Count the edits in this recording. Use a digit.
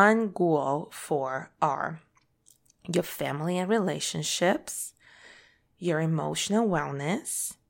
0